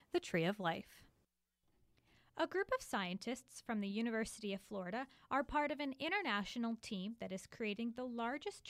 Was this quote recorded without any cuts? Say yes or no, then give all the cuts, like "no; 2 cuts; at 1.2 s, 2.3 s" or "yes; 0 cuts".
yes; 0 cuts